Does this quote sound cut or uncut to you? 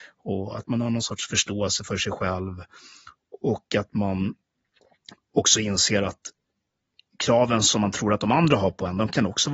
uncut